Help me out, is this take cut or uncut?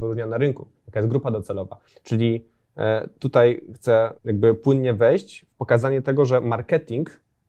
cut